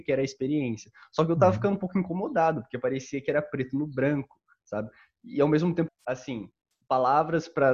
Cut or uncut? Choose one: cut